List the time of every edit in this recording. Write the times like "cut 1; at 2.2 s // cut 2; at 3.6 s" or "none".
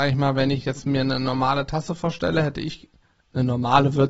none